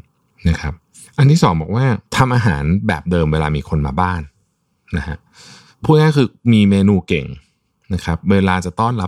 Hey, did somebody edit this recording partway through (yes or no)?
yes